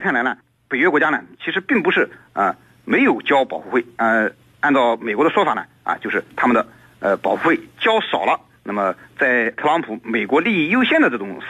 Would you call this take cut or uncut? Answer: uncut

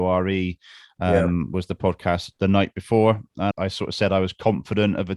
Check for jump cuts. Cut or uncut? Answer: cut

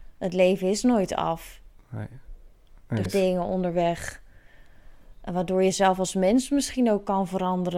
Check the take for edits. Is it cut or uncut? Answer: cut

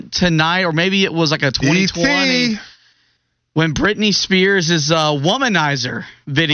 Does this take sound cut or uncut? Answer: uncut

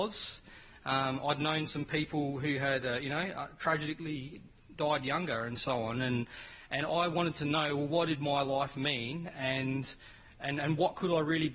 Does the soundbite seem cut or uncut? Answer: uncut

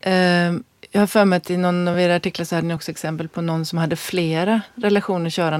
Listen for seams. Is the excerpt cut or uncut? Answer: uncut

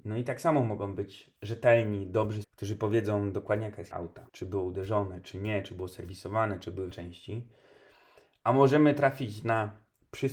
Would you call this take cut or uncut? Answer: cut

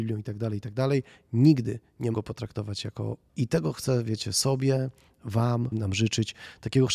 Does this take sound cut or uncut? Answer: cut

